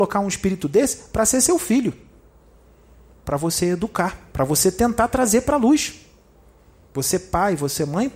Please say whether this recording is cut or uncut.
uncut